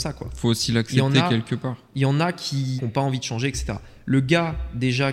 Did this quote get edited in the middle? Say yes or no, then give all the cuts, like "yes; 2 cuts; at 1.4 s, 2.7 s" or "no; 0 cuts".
yes; 1 cut; at 2.8 s